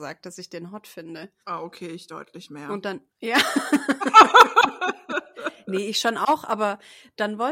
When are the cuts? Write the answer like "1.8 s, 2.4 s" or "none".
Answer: 1.4 s, 3.1 s

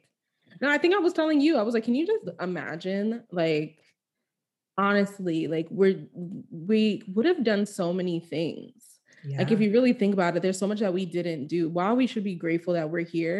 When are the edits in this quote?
none

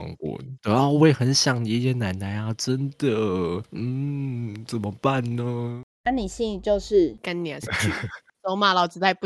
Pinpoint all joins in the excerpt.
7.7 s

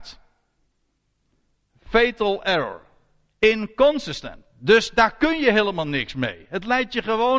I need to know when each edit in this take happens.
none

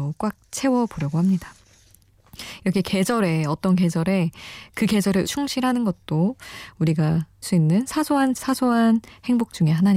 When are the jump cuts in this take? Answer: 5.2 s, 7.4 s, 8.4 s

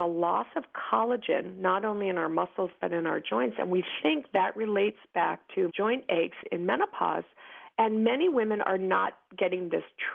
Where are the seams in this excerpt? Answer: none

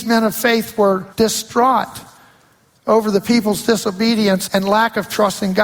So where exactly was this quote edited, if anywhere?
1.1 s, 4.5 s

